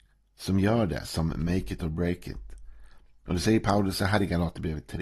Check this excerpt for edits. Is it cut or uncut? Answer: uncut